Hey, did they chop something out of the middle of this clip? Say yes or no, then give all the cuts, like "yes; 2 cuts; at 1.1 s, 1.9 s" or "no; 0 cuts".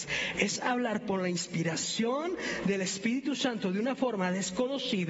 no; 0 cuts